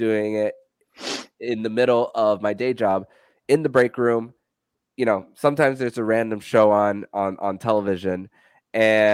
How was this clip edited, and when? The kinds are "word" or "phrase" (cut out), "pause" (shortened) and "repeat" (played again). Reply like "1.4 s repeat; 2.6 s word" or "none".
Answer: none

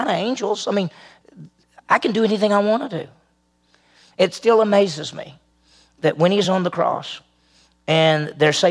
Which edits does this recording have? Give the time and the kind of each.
none

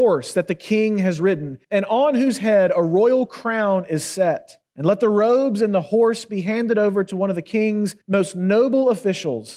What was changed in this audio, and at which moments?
1.6 s pause; 4.7 s pause; 8.0 s pause

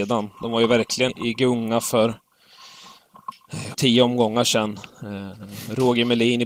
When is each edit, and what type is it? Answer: 1.1 s word; 3.7 s word

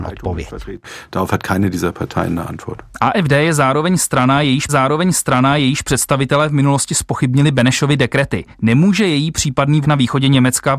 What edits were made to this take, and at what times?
4.7 s repeat; 8.5 s pause; 9.8 s phrase

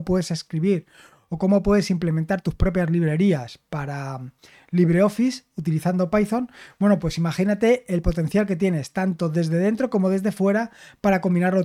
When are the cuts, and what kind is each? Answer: none

